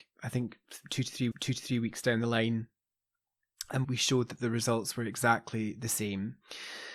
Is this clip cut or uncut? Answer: cut